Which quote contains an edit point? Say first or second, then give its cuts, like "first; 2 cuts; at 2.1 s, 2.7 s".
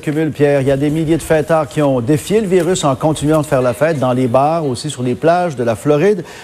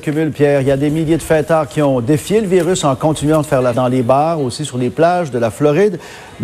second; 1 cut; at 3.7 s